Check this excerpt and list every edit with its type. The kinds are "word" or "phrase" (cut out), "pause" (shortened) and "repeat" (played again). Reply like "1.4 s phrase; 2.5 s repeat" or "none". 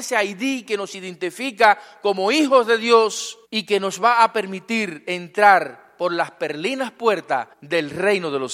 3.4 s pause; 7.5 s pause